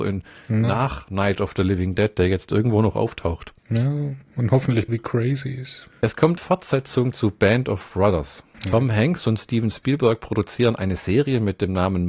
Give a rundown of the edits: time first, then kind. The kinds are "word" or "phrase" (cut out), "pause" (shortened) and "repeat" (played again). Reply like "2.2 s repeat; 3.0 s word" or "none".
3.6 s pause; 4.9 s word; 6.4 s word